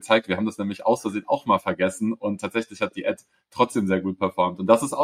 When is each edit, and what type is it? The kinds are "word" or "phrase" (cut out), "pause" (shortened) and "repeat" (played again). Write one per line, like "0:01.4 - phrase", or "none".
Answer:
none